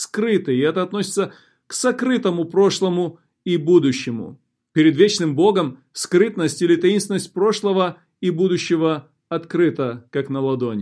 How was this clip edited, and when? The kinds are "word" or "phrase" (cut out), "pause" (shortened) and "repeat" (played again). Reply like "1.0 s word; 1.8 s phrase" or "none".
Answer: none